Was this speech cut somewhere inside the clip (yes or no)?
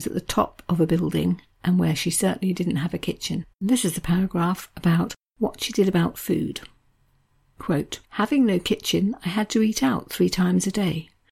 yes